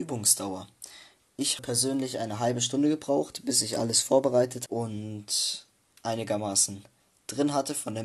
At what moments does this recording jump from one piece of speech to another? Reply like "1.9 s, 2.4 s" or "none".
1.6 s, 4.7 s